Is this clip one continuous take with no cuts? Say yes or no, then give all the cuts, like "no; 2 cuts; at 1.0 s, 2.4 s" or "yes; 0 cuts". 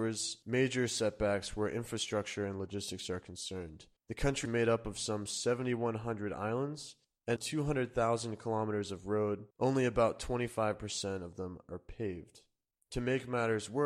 no; 4 cuts; at 4.0 s, 4.4 s, 7.4 s, 9.5 s